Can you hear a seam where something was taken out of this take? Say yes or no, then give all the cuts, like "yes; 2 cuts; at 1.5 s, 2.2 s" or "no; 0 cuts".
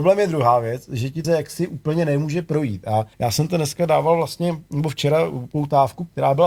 yes; 2 cuts; at 1.2 s, 3.1 s